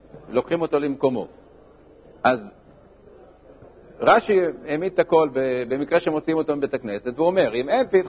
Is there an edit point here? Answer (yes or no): no